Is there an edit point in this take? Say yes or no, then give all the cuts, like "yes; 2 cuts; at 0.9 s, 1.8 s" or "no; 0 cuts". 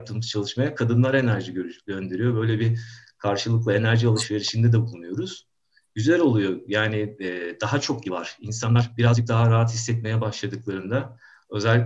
yes; 1 cut; at 8.0 s